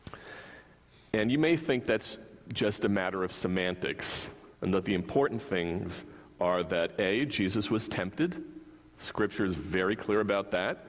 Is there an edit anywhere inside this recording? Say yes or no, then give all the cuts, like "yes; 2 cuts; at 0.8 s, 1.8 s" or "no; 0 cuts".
yes; 1 cut; at 4.5 s